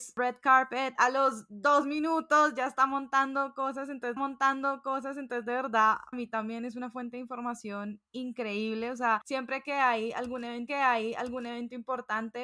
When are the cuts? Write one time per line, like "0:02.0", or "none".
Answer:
0:01.0
0:04.2
0:06.1
0:10.7